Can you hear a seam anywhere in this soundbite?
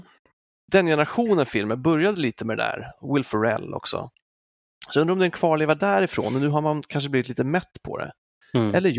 no; 0 cuts

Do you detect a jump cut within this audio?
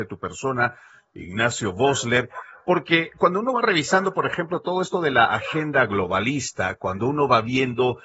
no; 0 cuts

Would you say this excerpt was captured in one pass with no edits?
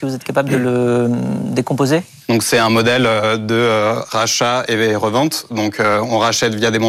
yes; 0 cuts

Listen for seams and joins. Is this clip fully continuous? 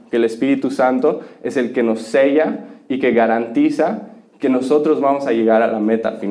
yes; 0 cuts

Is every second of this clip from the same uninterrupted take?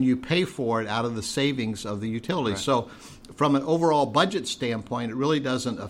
yes; 0 cuts

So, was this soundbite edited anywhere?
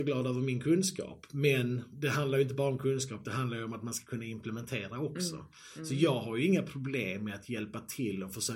no; 0 cuts

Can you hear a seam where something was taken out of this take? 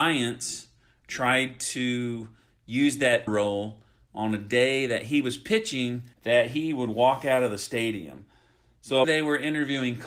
yes; 3 cuts; at 3.3 s, 6.1 s, 9.0 s

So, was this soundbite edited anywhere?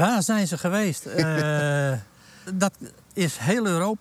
yes; 1 cut; at 2.5 s

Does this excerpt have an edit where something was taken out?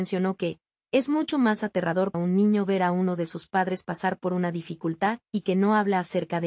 yes; 1 cut; at 2.1 s

